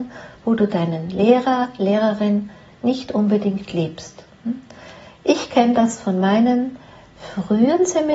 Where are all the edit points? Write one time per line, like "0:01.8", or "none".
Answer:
none